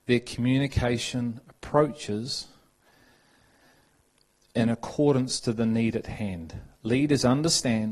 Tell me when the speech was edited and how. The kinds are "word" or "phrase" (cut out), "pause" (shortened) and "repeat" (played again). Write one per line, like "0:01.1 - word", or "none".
none